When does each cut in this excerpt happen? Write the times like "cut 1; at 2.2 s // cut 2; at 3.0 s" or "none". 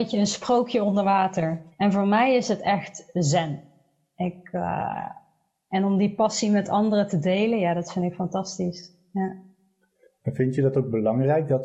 cut 1; at 1.7 s